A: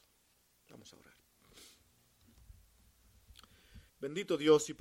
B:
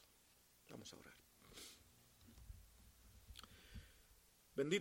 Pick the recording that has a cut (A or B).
A